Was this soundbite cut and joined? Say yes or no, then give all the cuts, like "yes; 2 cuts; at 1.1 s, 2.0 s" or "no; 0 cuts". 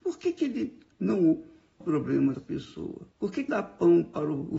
yes; 4 cuts; at 1.8 s, 2.3 s, 3.1 s, 3.5 s